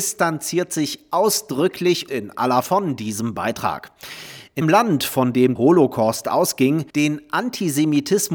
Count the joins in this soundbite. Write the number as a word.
five